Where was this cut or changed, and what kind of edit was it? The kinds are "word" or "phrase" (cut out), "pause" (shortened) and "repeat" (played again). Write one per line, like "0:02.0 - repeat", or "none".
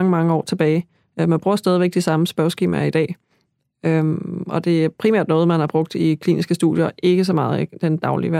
0:00.9 - pause